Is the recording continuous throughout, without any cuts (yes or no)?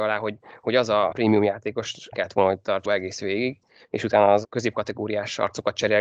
no